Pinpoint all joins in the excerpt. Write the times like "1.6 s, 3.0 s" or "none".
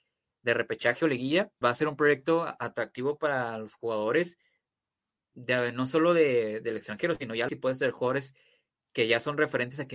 1.6 s, 7.5 s